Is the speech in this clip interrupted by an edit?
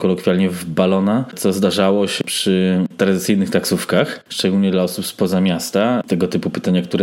no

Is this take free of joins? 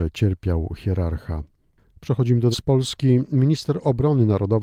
no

